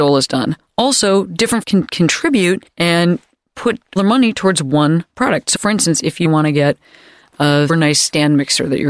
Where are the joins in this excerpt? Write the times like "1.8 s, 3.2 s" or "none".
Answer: 1.6 s, 4.0 s, 5.5 s, 6.2 s, 7.7 s